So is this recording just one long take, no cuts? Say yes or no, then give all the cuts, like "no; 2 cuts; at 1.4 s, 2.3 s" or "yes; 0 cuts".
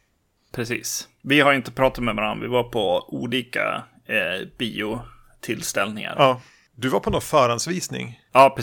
yes; 0 cuts